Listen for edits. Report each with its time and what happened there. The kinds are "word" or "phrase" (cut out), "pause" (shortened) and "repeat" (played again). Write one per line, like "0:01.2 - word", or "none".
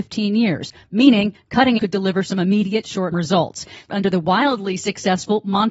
0:01.8 - word
0:03.1 - word
0:03.9 - phrase